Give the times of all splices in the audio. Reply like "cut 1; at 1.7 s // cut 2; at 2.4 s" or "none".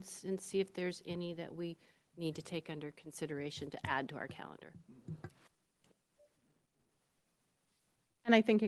none